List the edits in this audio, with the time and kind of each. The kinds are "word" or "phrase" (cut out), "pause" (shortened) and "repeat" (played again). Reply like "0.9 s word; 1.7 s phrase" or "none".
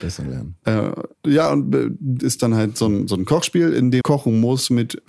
1.1 s pause; 2.2 s word; 4.0 s word

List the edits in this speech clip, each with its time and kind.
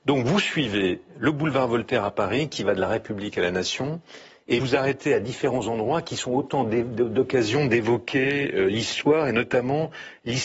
4.6 s word

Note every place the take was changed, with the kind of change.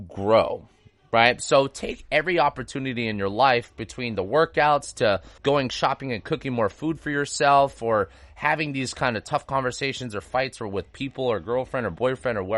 5.4 s pause

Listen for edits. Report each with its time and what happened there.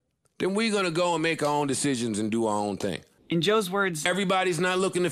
none

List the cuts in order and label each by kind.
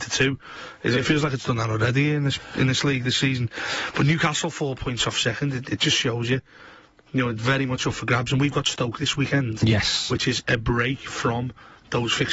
none

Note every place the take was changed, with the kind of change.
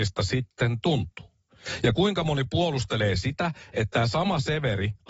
none

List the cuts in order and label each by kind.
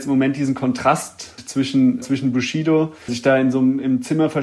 1.4 s word; 2.0 s word; 3.1 s word

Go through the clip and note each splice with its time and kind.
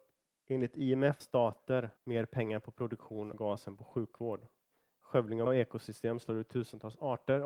1.2 s word; 2.0 s pause; 3.3 s phrase; 4.8 s pause; 5.5 s word

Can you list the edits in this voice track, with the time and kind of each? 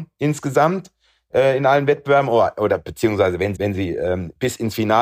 3.6 s word

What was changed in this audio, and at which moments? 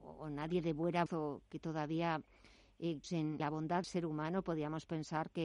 1.1 s word; 3.0 s word; 3.4 s word; 3.8 s word

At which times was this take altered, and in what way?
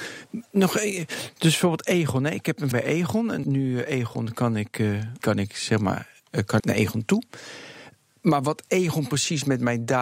2.7 s word; 3.4 s word; 5.2 s phrase; 6.6 s word

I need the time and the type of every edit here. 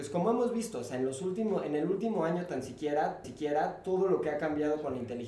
3.2 s repeat

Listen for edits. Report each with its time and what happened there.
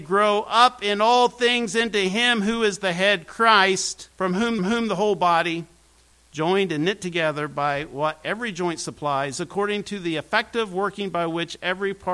4.1 s pause; 4.6 s repeat

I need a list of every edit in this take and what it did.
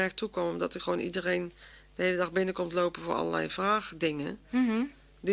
none

